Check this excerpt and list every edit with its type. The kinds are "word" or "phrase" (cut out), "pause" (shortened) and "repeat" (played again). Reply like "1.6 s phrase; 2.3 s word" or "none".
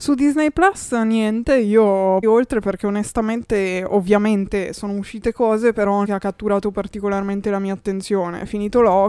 2.2 s word; 6.0 s word